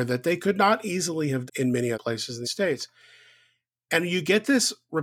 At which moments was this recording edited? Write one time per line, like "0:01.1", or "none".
0:01.5
0:01.9
0:02.4